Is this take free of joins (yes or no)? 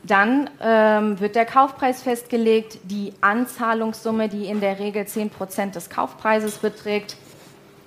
yes